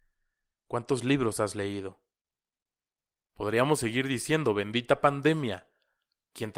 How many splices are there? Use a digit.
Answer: 0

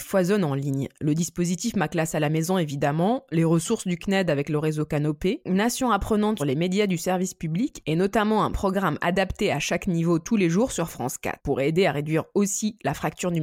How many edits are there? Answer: 1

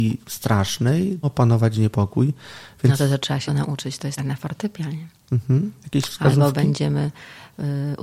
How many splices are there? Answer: 3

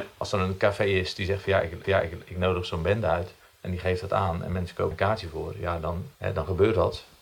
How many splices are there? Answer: 4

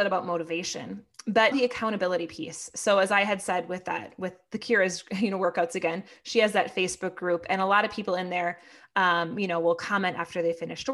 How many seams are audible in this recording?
1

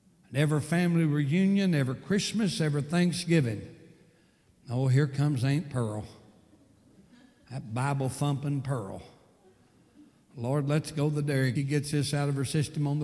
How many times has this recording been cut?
1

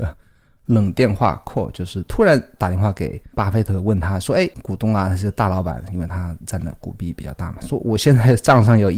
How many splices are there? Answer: 2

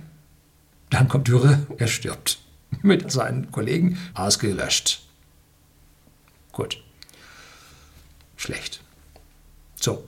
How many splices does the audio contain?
4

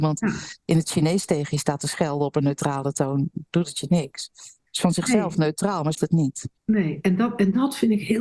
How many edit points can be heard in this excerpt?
1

